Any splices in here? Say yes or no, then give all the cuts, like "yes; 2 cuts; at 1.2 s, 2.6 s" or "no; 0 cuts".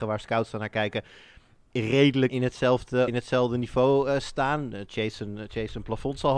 yes; 2 cuts; at 2.3 s, 3.1 s